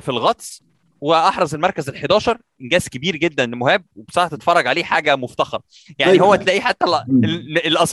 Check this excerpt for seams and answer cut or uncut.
uncut